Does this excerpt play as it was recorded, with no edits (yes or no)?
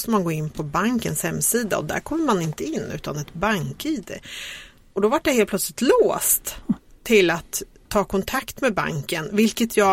yes